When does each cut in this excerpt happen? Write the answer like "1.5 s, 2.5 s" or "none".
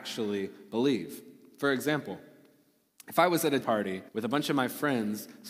3.6 s, 4.1 s